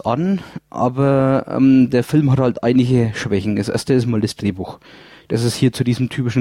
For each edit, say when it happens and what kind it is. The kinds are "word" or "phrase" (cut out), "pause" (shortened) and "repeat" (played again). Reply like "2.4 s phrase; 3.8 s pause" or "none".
none